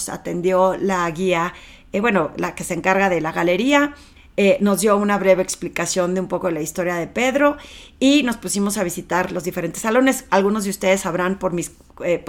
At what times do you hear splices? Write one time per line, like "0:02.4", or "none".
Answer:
none